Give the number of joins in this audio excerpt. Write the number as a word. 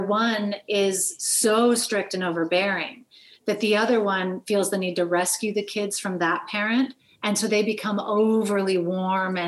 zero